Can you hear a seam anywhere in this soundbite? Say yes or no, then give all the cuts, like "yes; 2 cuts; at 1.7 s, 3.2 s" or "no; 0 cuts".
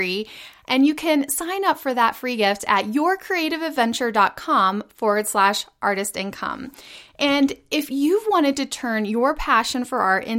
no; 0 cuts